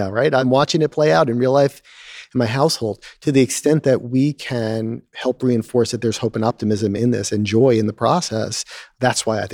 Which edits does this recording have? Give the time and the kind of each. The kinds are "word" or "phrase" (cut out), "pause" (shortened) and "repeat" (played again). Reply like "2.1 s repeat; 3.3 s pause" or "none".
none

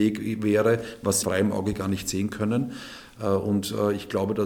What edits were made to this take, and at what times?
1.2 s word

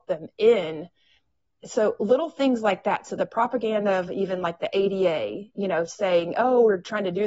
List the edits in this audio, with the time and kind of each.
none

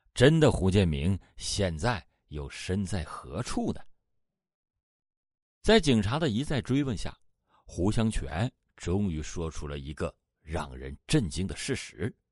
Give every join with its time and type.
none

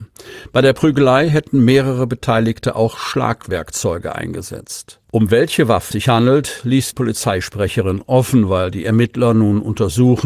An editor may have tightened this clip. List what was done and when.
5.0 s pause; 5.9 s word; 6.9 s word

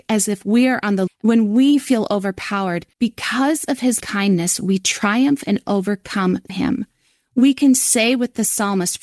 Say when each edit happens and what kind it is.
1.1 s phrase; 2.9 s pause; 4.0 s word; 6.5 s word

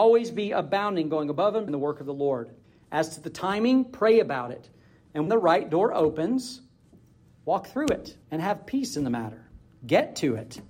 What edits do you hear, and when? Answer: 1.7 s word; 2.6 s pause; 5.3 s word; 8.2 s pause

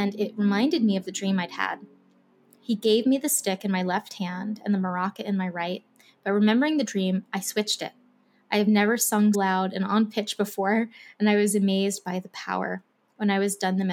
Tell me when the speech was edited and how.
9.3 s word

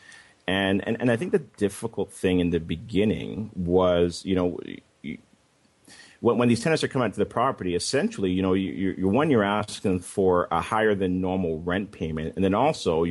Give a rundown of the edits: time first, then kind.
none

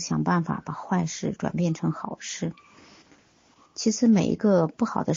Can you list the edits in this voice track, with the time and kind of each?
none

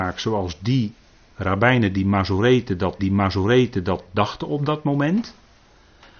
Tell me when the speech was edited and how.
3.0 s repeat

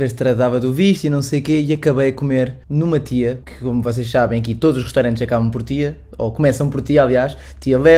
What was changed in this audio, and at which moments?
2.6 s pause; 3.4 s pause

